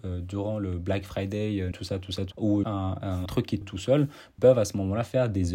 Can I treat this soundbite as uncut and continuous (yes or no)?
no